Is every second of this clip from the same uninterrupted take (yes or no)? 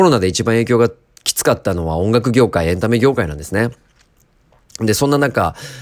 yes